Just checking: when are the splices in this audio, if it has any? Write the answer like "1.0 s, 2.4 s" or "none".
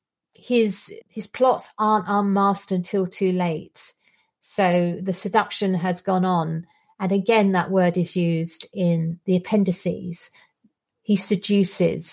1.0 s